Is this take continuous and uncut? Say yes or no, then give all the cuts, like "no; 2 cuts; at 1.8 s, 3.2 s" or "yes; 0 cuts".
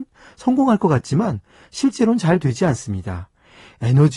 yes; 0 cuts